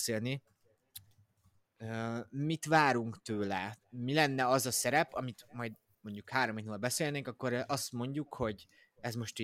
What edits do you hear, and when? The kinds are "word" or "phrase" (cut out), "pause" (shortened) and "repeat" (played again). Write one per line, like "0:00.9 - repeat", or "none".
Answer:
0:03.8 - pause